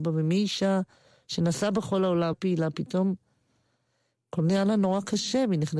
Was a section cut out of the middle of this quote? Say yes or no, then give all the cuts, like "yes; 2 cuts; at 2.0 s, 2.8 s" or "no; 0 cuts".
yes; 1 cut; at 2.3 s